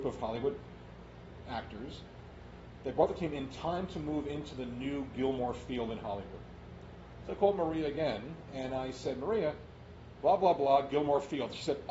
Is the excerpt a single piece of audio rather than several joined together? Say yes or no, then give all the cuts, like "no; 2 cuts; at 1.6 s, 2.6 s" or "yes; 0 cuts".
yes; 0 cuts